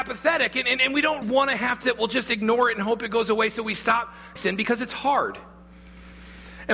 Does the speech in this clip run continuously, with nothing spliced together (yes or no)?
no